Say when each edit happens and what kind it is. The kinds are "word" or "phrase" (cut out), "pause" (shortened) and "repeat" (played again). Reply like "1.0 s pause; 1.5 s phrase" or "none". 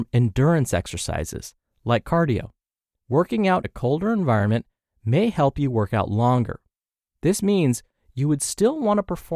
3.6 s word